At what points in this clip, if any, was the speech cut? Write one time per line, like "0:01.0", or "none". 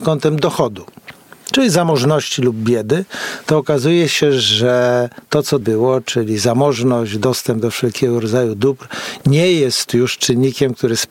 0:05.6